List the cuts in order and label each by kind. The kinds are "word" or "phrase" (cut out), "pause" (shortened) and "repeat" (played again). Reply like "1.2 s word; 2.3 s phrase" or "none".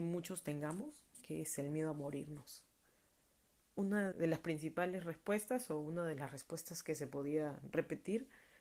4.1 s word